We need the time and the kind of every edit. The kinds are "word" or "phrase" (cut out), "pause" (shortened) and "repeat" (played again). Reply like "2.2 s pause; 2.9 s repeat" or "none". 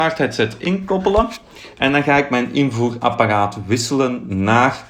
none